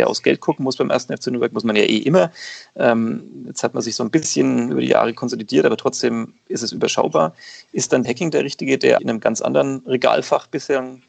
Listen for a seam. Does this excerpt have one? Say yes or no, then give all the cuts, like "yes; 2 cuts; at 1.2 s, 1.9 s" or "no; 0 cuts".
yes; 2 cuts; at 8.0 s, 9.0 s